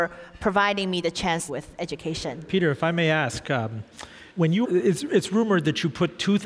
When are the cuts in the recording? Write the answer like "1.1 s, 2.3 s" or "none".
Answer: 1.5 s, 4.3 s, 4.6 s